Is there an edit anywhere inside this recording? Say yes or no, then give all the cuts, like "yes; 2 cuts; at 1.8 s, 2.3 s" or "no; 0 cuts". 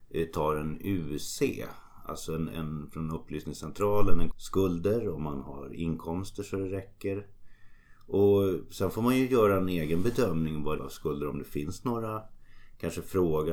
yes; 2 cuts; at 4.3 s, 10.8 s